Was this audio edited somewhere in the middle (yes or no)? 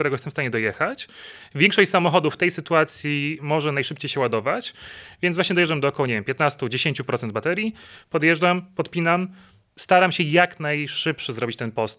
no